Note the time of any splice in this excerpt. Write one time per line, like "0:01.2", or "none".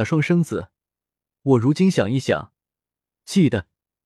none

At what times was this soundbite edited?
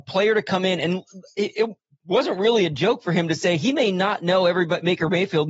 none

